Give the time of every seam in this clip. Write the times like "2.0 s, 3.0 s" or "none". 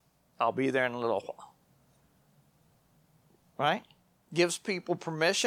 none